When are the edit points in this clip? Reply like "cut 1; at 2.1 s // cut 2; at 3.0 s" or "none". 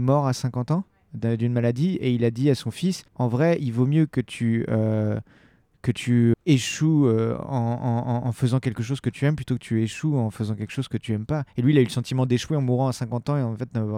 cut 1; at 3.1 s // cut 2; at 6.3 s